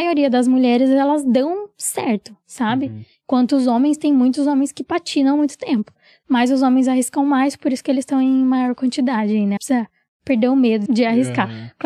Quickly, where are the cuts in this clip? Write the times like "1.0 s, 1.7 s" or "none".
9.6 s, 10.9 s